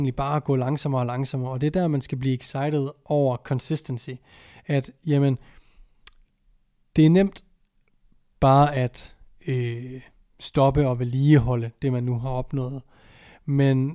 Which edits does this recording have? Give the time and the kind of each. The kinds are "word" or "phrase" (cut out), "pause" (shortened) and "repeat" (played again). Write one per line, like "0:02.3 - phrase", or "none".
none